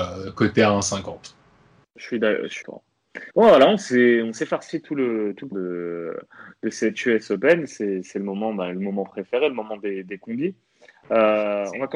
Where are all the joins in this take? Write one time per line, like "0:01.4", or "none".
0:02.6
0:03.3
0:05.5